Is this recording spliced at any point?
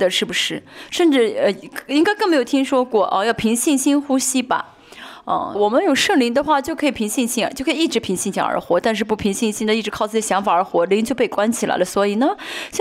yes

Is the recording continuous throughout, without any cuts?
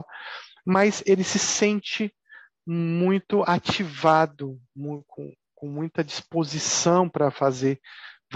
yes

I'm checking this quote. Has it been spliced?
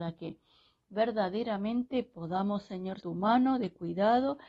yes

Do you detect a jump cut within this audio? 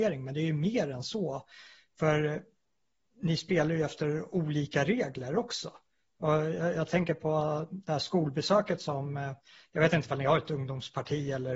no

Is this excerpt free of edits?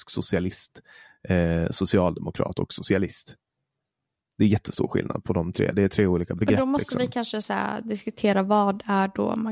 yes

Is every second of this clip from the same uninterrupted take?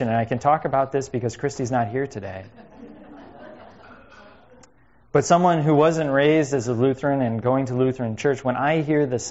yes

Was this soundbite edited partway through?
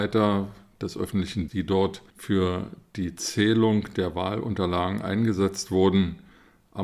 yes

